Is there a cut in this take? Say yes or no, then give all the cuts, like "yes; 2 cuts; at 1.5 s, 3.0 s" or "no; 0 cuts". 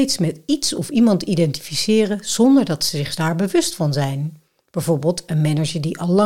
no; 0 cuts